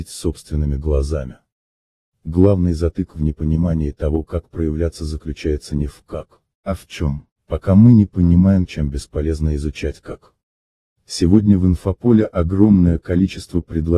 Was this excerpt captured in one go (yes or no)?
yes